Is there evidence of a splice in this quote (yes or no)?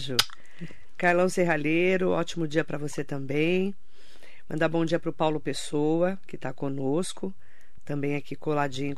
no